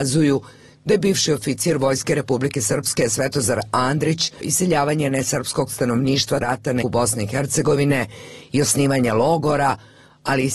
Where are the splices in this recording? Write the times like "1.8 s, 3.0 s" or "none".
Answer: 4.4 s, 6.4 s, 6.8 s